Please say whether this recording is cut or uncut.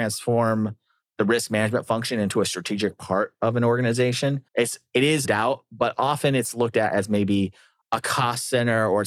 cut